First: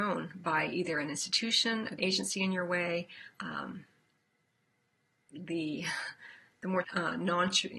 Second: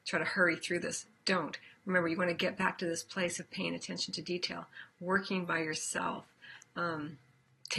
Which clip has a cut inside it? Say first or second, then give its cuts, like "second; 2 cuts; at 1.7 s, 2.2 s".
first; 3 cuts; at 2.0 s, 3.3 s, 6.8 s